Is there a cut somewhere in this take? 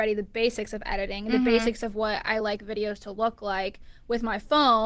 no; 0 cuts

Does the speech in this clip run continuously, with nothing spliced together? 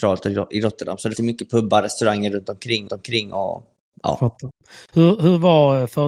no; 2 cuts; at 1.2 s, 2.9 s

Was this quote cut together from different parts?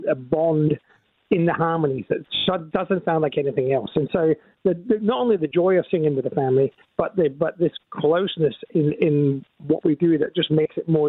no; 0 cuts

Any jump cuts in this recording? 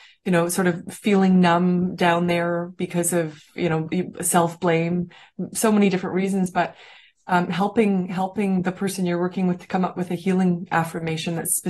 no; 0 cuts

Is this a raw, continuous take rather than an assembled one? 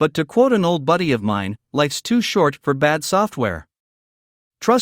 yes; 0 cuts

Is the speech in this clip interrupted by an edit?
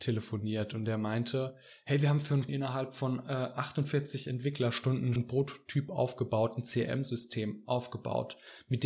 yes; 2 cuts; at 2.5 s, 5.2 s

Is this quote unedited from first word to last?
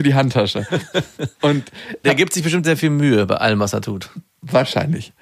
no; 2 cuts; at 2.0 s, 2.6 s

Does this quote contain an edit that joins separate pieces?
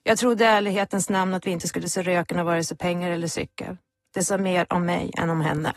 no; 0 cuts

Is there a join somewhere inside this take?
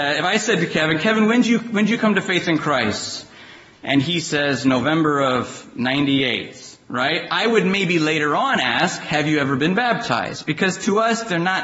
no; 0 cuts

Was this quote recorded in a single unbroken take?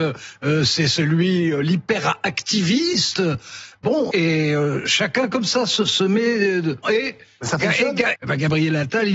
no; 3 cuts; at 4.1 s, 6.8 s, 8.1 s

